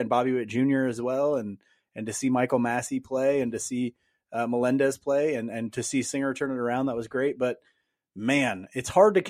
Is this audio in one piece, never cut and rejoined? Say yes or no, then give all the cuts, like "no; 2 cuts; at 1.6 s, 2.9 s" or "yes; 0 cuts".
yes; 0 cuts